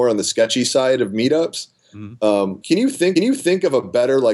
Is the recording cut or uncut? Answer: cut